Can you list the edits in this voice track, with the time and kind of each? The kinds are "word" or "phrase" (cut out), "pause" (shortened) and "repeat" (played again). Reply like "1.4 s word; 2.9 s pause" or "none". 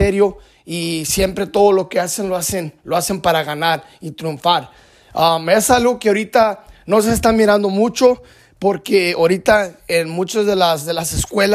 none